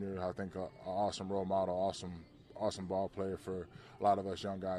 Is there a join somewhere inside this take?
no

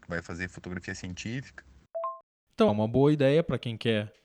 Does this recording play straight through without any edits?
no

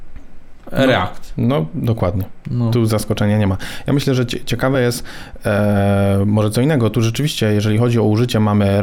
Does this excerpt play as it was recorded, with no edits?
yes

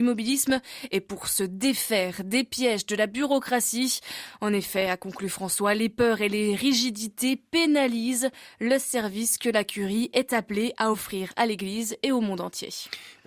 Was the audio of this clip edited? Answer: no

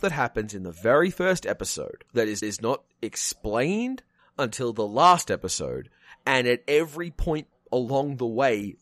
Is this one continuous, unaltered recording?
no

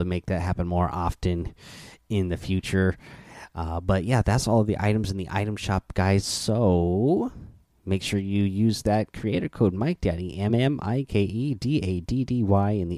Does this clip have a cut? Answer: yes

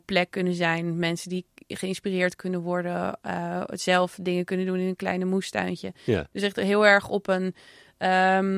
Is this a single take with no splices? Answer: yes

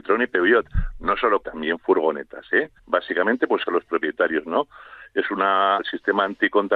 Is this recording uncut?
no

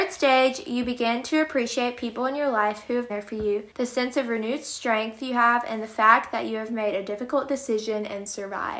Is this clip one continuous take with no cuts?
no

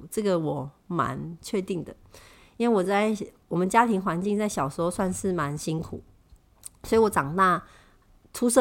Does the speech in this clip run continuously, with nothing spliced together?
yes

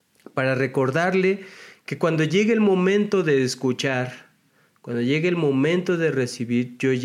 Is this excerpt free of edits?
yes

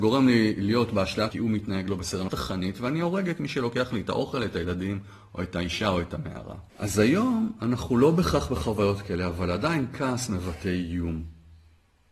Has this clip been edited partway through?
yes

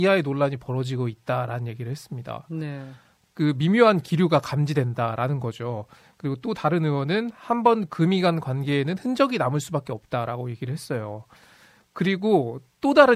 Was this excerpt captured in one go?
yes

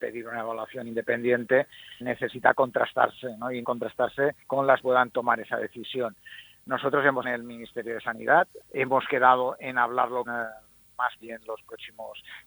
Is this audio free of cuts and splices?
no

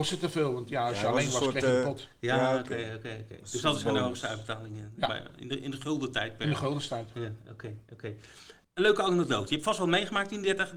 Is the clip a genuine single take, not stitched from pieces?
yes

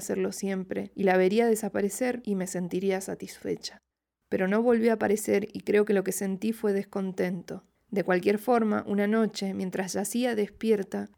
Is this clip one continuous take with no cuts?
yes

